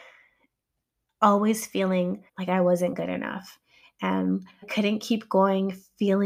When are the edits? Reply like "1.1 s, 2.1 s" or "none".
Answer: 2.3 s, 4.6 s